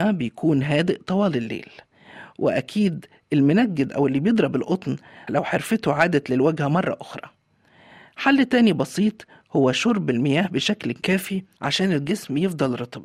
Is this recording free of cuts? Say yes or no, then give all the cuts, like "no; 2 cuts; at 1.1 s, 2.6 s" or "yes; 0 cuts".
no; 1 cut; at 5.3 s